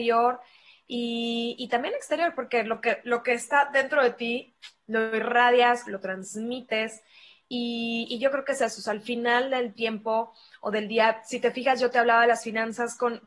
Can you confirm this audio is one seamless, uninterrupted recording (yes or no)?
yes